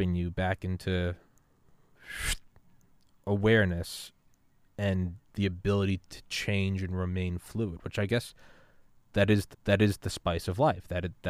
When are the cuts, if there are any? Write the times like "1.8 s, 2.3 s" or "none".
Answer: 9.5 s